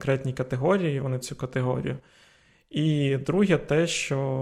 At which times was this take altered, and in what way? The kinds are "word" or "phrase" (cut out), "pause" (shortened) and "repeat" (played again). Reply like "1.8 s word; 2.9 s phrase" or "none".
1.2 s phrase